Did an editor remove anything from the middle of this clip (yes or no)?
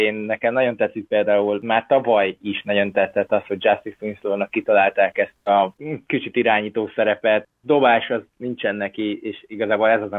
no